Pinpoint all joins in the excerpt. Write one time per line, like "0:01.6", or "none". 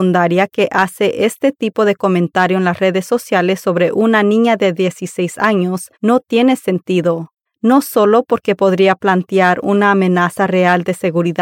0:05.9
0:07.5